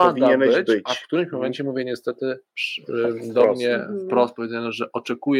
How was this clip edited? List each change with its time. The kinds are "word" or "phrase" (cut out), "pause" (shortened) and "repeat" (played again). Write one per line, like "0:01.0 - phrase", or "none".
0:02.5 - pause